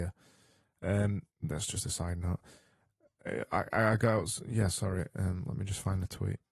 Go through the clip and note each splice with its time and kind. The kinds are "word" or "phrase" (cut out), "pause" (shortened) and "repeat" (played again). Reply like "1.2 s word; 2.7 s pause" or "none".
1.3 s pause